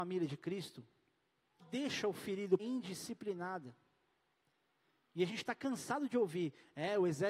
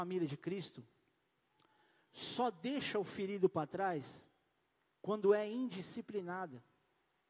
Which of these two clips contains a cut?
first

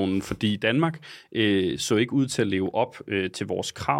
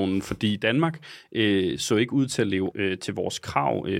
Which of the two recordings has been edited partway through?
second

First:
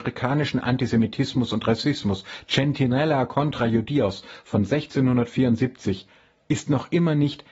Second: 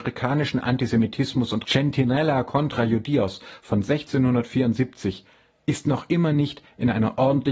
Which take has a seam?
second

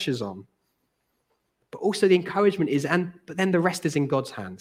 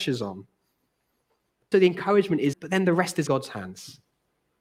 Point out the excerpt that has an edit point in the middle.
second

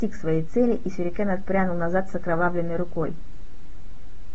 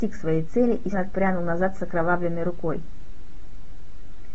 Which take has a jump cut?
second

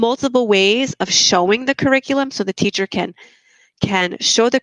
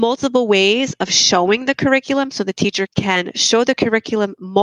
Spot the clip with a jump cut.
second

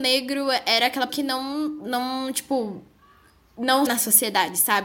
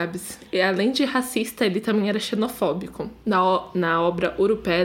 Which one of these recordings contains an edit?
first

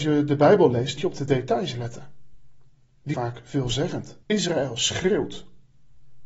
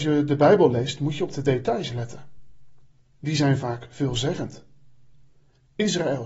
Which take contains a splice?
first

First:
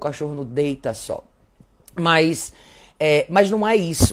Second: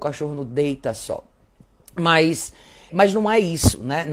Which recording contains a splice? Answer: second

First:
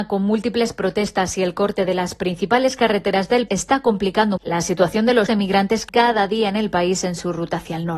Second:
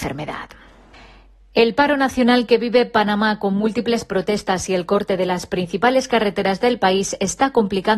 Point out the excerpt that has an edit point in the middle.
first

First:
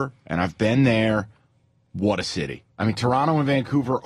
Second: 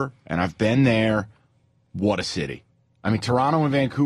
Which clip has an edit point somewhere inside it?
first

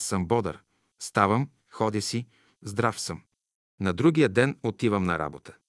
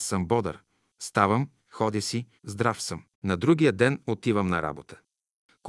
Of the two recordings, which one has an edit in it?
second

